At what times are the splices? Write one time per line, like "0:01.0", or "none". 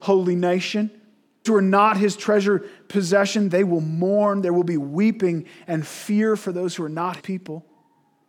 0:01.5
0:07.2